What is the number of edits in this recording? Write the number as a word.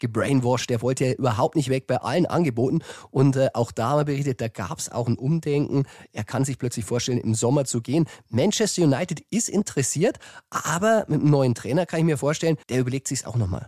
one